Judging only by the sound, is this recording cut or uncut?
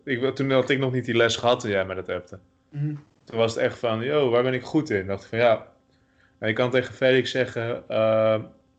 uncut